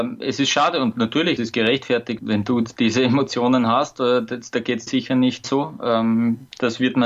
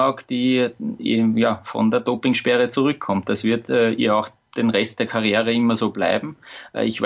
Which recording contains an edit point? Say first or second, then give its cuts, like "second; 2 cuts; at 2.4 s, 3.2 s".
first; 4 cuts; at 1.4 s, 2.2 s, 4.9 s, 5.4 s